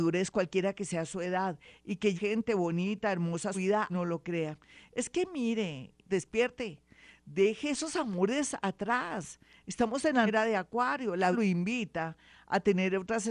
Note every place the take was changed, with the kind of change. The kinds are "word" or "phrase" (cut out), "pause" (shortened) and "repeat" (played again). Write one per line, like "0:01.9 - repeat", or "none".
0:02.2 - word
0:03.5 - word
0:03.9 - word
0:06.1 - word
0:10.3 - word
0:11.3 - word